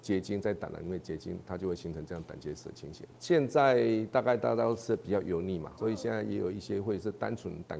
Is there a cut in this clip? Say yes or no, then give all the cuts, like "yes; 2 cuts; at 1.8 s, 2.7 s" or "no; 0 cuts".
yes; 1 cut; at 5.8 s